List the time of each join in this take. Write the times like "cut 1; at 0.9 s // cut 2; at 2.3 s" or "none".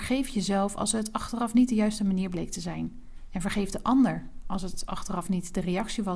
none